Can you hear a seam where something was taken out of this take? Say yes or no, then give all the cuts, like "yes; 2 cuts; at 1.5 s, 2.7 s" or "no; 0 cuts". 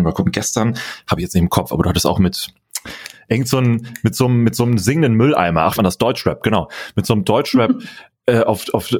yes; 1 cut; at 5.8 s